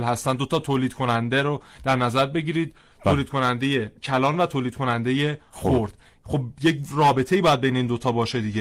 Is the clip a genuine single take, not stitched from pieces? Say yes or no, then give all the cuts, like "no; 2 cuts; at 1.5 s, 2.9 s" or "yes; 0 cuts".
no; 1 cut; at 4.0 s